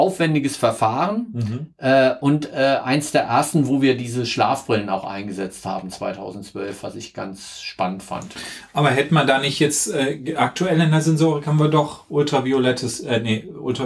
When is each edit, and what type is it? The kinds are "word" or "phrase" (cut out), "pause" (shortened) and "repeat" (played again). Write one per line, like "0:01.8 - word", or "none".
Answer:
none